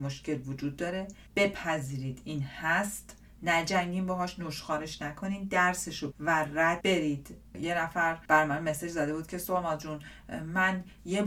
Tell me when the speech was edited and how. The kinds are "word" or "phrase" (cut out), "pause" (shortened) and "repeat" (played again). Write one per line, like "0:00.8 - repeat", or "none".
0:01.3 - pause
0:06.1 - word
0:06.8 - word
0:08.2 - pause